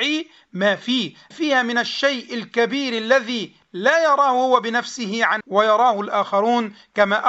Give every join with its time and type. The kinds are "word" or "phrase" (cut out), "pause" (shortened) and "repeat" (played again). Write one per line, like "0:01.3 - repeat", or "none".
0:01.3 - word
0:05.4 - word